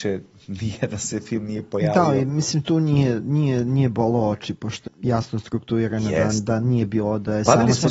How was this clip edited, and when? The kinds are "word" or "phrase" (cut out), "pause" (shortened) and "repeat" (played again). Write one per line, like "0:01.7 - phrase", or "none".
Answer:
0:04.9 - phrase